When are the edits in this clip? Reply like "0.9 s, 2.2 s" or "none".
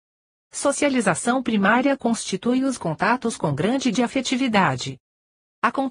3.9 s